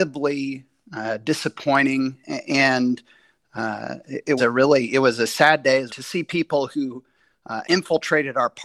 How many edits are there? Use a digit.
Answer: 3